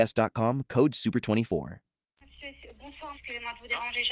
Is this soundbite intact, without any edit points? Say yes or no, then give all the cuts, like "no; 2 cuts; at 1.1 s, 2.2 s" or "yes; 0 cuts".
no; 1 cut; at 3.1 s